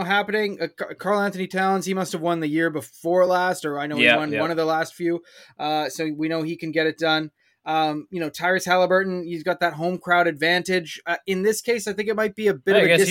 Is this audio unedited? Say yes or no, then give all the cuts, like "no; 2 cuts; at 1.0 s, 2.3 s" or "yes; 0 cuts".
yes; 0 cuts